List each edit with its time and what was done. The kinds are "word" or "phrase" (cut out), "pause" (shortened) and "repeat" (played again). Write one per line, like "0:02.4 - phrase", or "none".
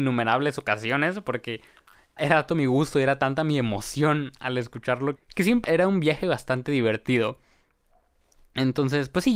0:02.2 - word
0:02.5 - word
0:05.2 - word
0:05.6 - word

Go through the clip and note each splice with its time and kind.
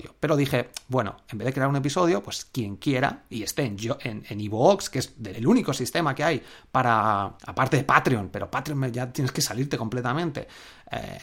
0:05.3 - word
0:07.4 - pause

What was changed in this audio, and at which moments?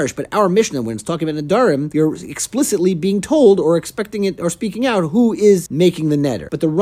none

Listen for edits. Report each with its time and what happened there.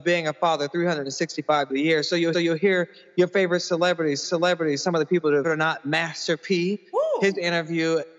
0:01.7 - phrase
0:02.3 - repeat
0:04.2 - repeat
0:05.4 - phrase

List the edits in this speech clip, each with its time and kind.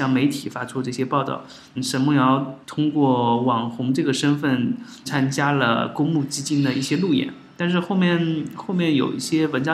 0:01.8 - word
0:02.6 - pause
0:05.0 - word

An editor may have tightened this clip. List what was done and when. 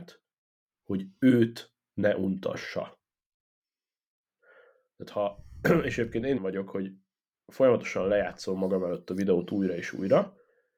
0:06.4 - phrase

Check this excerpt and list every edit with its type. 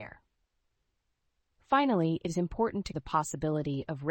0:02.9 - word

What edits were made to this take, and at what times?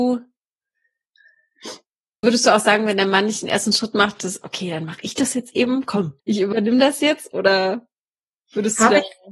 0:02.2 - word
0:06.2 - pause

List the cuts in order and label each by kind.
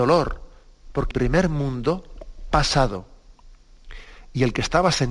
0:01.1 - word
0:02.5 - word

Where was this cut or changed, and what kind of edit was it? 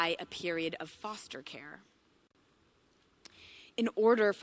none

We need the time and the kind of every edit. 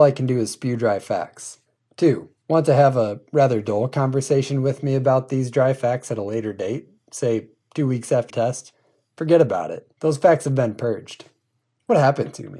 0:02.4 - pause
0:08.3 - word
0:09.9 - pause

